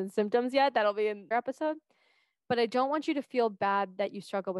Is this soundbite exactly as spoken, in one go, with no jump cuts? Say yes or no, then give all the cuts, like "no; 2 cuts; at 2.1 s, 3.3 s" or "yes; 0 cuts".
no; 1 cut; at 1.3 s